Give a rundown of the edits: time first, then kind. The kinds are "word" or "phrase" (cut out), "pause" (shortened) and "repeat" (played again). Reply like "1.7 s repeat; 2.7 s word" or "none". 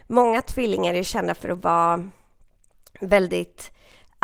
none